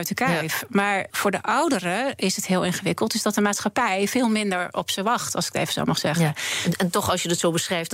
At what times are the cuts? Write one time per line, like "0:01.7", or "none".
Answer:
0:01.1